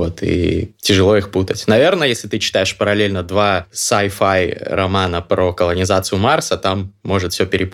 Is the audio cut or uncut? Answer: uncut